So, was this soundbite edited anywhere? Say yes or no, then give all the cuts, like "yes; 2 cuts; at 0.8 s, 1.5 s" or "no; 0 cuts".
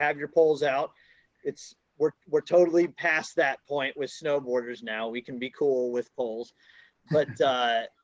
no; 0 cuts